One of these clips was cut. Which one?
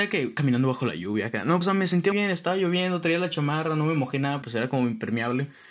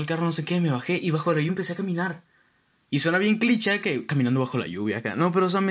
first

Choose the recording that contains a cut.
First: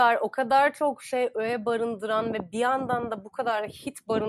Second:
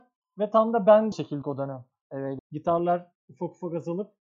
second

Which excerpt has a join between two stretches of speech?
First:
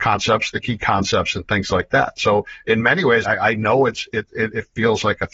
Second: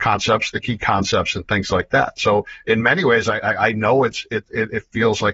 first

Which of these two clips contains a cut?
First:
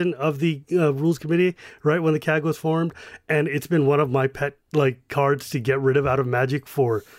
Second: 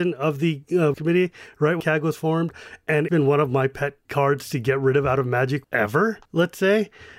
second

